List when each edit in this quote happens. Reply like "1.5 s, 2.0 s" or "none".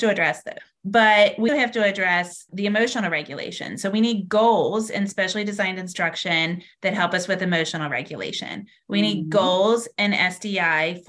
1.5 s, 2.5 s